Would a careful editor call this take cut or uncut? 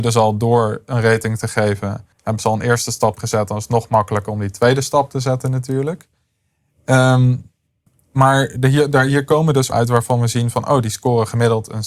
cut